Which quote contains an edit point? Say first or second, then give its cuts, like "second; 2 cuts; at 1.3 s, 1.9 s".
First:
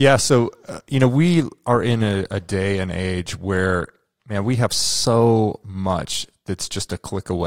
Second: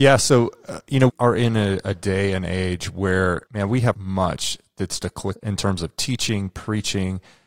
second; 5 cuts; at 1.1 s, 3.5 s, 3.9 s, 5.0 s, 5.4 s